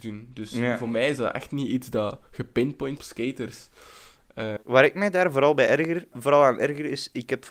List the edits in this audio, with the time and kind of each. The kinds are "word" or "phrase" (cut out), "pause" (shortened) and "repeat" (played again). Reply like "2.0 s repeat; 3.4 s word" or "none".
3.0 s phrase; 4.6 s pause; 6.1 s word